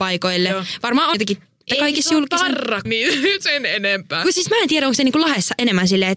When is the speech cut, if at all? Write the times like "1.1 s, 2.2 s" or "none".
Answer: 1.1 s, 1.7 s, 2.8 s, 3.4 s